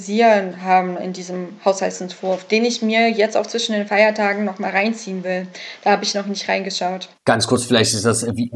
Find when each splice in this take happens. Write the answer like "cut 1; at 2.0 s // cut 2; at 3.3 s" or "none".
none